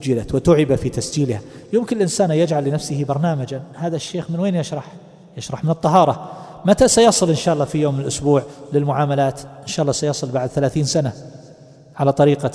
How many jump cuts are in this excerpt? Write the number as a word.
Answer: zero